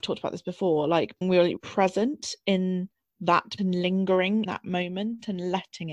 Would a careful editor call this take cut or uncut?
cut